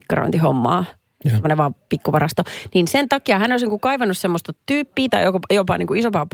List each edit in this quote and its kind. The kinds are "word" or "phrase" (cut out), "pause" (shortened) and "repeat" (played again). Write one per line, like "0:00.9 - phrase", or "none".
none